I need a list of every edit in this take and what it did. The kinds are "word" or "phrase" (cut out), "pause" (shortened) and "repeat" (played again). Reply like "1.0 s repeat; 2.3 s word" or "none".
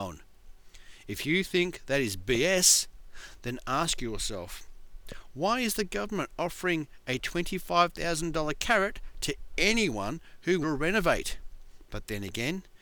10.6 s phrase